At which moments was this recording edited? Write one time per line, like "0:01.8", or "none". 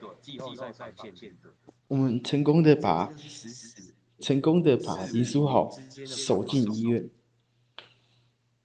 0:01.8
0:04.2